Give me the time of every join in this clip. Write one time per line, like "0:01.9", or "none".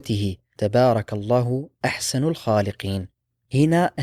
none